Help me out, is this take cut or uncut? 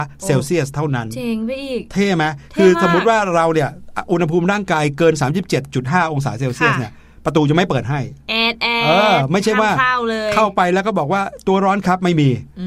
uncut